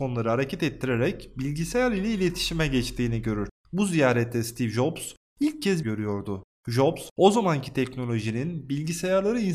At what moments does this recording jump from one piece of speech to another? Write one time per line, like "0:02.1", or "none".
0:05.8